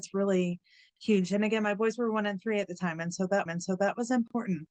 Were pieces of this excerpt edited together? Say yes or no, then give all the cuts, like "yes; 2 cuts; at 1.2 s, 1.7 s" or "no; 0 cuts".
yes; 1 cut; at 3.5 s